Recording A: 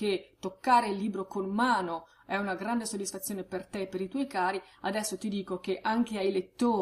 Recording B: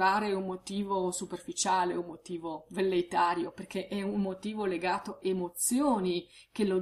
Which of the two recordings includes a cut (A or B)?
B